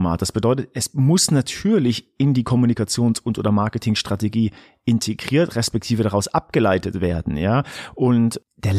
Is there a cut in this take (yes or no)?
no